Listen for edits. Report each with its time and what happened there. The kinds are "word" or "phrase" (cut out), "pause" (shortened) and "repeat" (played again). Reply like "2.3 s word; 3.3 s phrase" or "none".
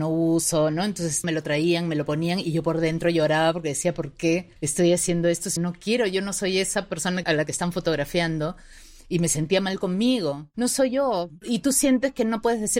1.2 s word; 4.6 s pause; 5.6 s word; 7.2 s word